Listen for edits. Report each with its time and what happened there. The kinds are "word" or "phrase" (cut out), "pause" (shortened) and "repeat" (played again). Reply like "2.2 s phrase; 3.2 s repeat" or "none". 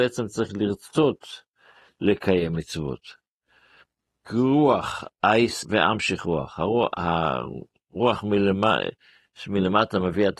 5.6 s word